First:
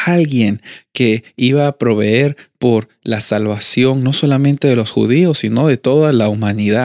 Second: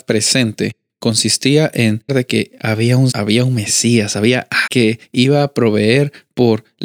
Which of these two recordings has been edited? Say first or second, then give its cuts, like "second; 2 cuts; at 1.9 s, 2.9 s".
second; 3 cuts; at 2.1 s, 3.1 s, 4.7 s